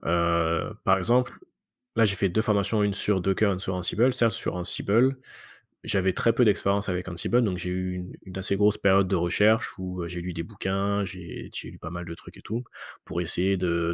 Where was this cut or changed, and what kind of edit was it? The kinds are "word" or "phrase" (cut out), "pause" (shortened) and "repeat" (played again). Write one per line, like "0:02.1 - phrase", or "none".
none